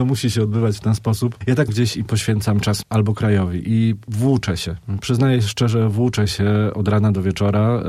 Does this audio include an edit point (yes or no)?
yes